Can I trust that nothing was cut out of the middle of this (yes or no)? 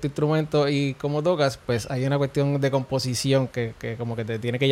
yes